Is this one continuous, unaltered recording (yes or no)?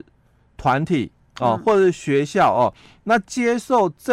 yes